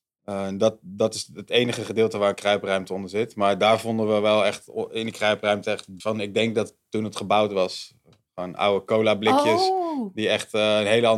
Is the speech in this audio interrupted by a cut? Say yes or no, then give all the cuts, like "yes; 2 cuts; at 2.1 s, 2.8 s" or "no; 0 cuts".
yes; 1 cut; at 6.0 s